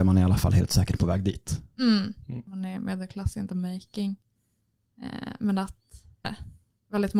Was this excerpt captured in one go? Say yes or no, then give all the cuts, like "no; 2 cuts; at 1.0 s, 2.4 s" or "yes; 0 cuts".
no; 1 cut; at 6.2 s